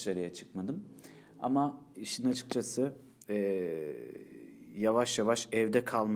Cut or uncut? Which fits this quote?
cut